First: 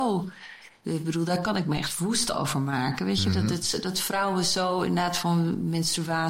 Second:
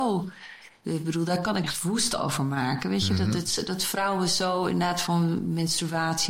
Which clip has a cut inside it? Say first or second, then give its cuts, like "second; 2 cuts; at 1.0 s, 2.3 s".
second; 1 cut; at 1.6 s